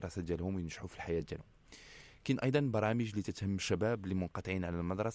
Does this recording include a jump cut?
no; 0 cuts

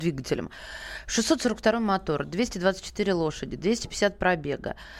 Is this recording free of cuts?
yes; 0 cuts

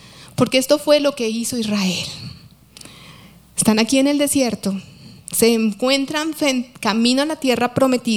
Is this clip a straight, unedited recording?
yes; 0 cuts

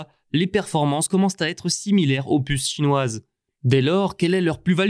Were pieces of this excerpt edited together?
no; 0 cuts

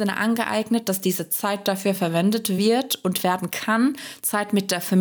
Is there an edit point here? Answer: no; 0 cuts

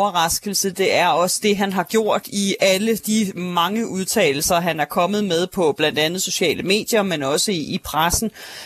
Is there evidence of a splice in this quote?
no; 0 cuts

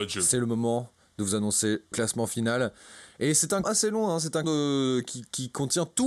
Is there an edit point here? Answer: yes; 3 cuts; at 1.9 s, 3.6 s, 4.4 s

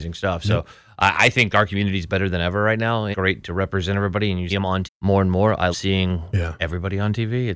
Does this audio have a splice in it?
yes; 4 cuts; at 3.1 s, 4.5 s, 4.8 s, 5.7 s

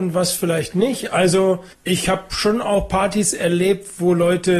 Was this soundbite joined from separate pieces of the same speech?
yes; 1 cut; at 1.7 s

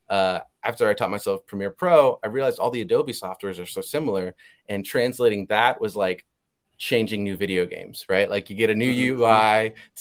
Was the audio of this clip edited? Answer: no; 0 cuts

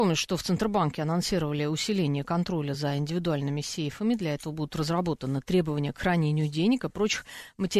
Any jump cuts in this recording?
no; 0 cuts

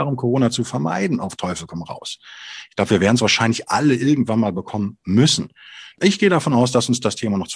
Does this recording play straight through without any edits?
yes; 0 cuts

